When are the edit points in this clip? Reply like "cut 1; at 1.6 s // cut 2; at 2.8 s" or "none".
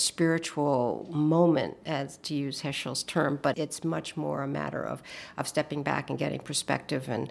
cut 1; at 3.5 s